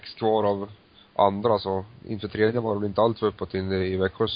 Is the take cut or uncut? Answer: cut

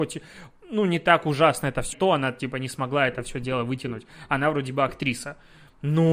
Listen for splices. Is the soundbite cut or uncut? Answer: cut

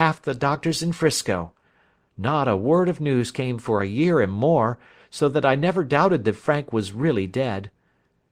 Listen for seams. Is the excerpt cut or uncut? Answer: uncut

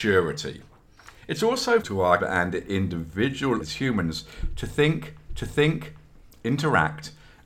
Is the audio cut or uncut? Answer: cut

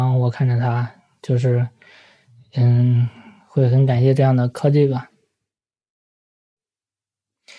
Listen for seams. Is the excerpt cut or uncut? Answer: uncut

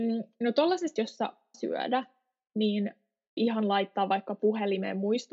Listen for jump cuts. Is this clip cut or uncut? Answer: cut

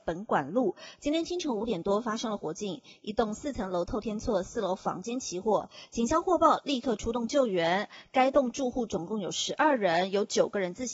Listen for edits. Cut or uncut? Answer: uncut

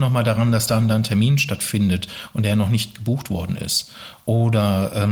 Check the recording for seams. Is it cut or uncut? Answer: uncut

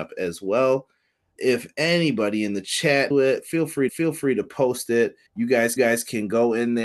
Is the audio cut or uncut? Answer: cut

